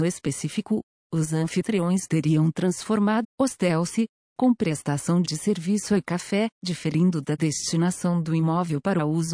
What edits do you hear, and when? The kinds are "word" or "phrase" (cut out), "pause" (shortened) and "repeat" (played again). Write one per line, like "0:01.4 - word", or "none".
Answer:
0:03.2 - phrase
0:06.5 - pause